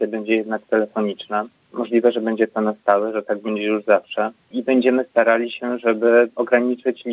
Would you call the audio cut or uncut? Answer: uncut